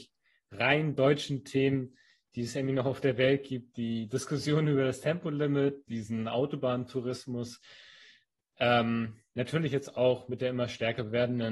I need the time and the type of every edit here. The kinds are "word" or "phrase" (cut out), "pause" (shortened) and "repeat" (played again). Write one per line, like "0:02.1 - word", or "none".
none